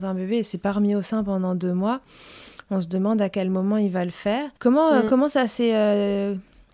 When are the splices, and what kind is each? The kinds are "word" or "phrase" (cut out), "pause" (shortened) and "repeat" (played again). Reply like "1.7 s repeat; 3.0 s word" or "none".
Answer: 4.6 s pause